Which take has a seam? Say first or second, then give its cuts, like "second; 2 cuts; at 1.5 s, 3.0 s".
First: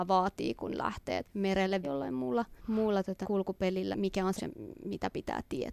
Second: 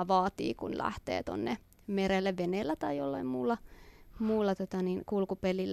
first; 6 cuts; at 1.2 s, 1.8 s, 2.6 s, 3.2 s, 3.9 s, 4.4 s